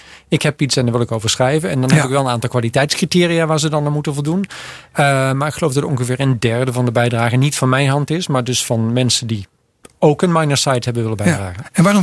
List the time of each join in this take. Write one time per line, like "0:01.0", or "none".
none